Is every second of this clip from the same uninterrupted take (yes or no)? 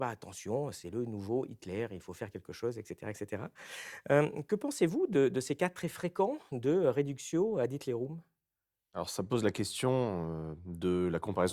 yes